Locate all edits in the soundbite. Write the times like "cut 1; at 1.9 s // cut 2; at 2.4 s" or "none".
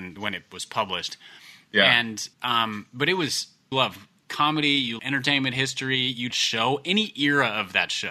cut 1; at 2.3 s // cut 2; at 3.7 s // cut 3; at 5.0 s // cut 4; at 6.3 s